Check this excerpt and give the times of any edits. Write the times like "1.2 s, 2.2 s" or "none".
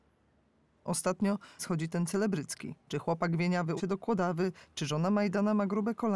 1.6 s, 2.8 s, 3.8 s

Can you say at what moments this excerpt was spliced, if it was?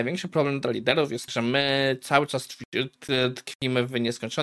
1.3 s

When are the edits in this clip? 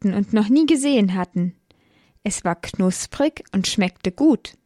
none

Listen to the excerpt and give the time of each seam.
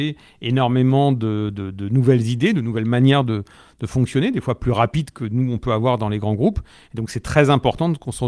none

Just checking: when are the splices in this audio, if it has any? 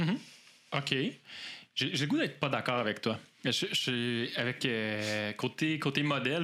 none

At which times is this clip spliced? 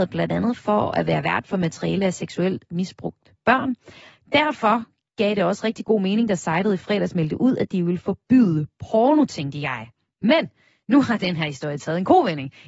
none

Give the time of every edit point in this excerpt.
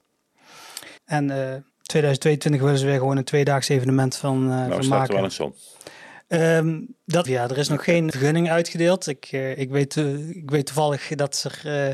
1.0 s, 1.7 s, 7.3 s, 8.1 s

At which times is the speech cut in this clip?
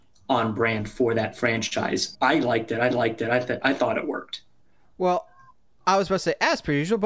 2.1 s, 2.9 s, 4.6 s

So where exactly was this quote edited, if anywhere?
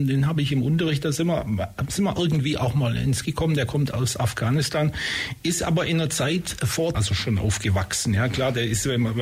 3.2 s, 6.9 s

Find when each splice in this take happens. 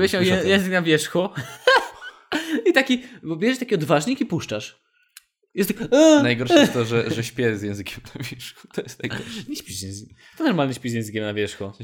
none

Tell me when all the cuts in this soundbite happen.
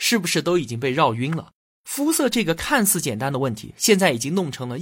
none

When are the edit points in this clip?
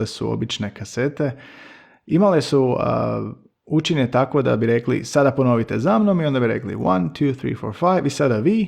none

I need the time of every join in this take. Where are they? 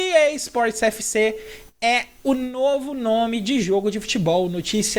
none

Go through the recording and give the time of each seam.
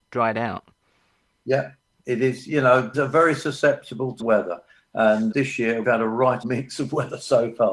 2.9 s, 4.2 s, 5.3 s, 5.8 s, 6.4 s

